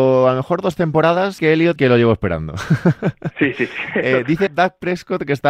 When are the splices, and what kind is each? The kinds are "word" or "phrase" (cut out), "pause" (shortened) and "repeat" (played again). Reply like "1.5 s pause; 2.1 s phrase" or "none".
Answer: 1.4 s word; 1.8 s word; 4.5 s word

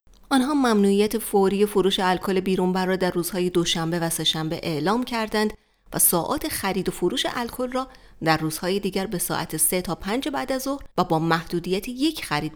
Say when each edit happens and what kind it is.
10.9 s pause

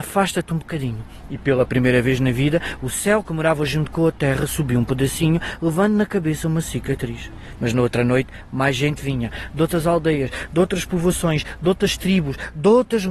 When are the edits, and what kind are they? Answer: none

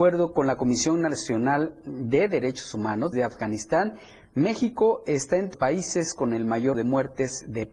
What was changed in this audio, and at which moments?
3.1 s word; 5.5 s word; 6.7 s word

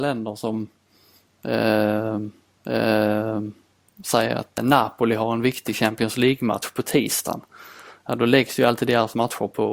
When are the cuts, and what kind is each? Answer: 2.6 s repeat; 4.6 s word

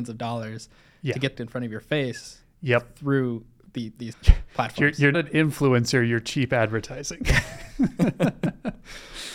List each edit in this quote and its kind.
1.3 s phrase; 4.1 s word; 5.1 s word

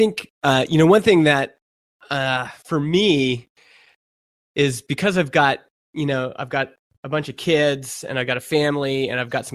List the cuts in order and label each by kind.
none

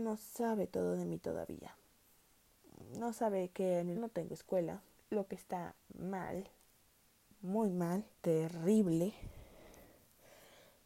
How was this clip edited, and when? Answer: 3.9 s word; 5.0 s pause; 8.1 s pause

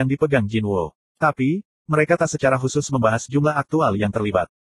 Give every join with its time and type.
none

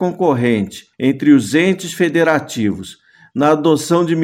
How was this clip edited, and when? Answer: 0.9 s pause

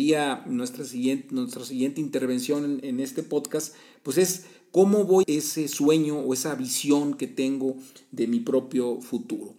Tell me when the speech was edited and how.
5.2 s phrase

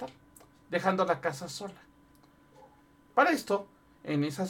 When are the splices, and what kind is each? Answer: none

